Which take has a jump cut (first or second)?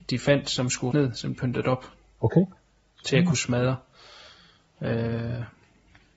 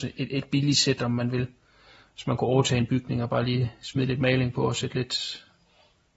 first